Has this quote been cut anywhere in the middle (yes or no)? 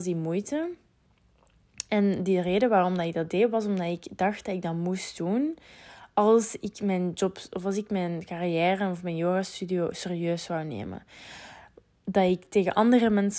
no